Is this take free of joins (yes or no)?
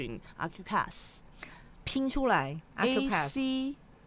yes